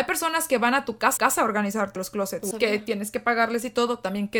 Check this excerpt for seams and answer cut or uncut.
cut